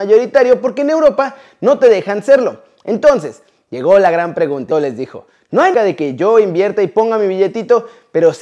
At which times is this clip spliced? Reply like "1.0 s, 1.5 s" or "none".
4.7 s, 5.7 s